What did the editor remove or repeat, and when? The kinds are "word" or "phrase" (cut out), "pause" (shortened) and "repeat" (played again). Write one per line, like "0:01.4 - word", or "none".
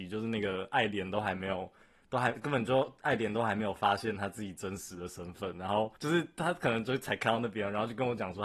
0:06.0 - pause